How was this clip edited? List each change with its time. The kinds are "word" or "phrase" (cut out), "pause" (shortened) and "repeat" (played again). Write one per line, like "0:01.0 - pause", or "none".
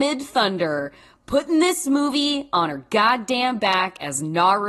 none

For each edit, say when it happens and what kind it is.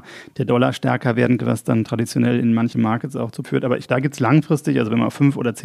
0:01.4 - word
0:02.7 - word
0:03.4 - word
0:03.9 - word

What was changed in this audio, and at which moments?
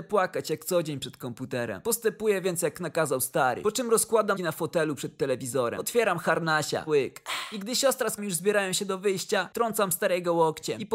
0:04.4 - word
0:06.9 - word
0:08.2 - word

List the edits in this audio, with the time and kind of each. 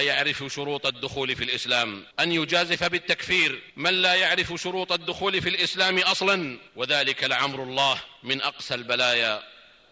0:02.1 - pause
0:03.7 - pause
0:06.7 - pause
0:08.2 - pause

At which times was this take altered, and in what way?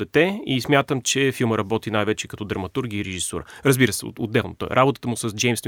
none

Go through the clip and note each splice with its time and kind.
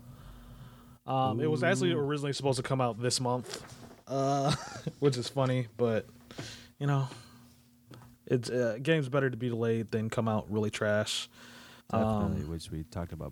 0:01.0 - pause
0:08.1 - pause
0:11.8 - pause

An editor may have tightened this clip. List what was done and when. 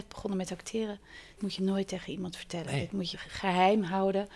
0:01.4 - phrase
0:03.1 - word

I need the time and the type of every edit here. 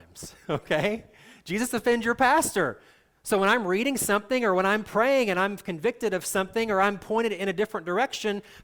none

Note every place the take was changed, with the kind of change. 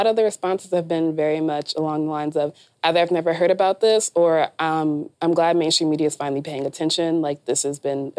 0:05.1 - pause

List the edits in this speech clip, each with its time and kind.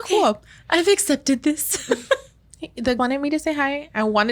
0:03.0 - word

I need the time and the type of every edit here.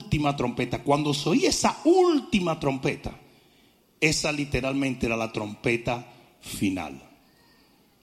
none

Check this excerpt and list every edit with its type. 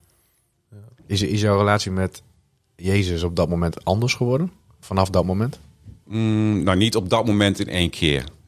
0:06.0 - pause

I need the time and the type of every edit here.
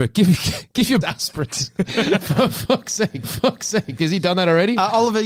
0:01.0 - phrase
0:03.2 - repeat

